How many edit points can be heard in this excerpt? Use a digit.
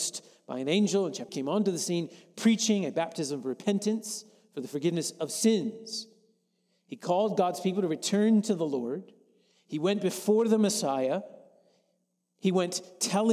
1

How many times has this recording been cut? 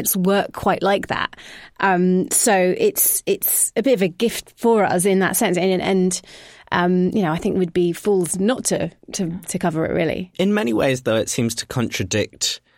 0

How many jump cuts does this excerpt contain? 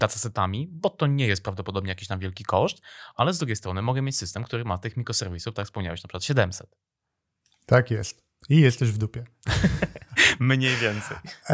0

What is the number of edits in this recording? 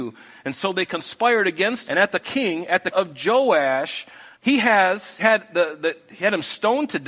5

